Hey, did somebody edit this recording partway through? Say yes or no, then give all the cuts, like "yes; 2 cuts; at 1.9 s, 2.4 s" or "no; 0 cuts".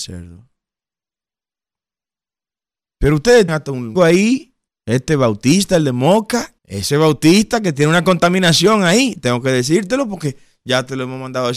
yes; 4 cuts; at 3.5 s, 4.0 s, 4.7 s, 6.6 s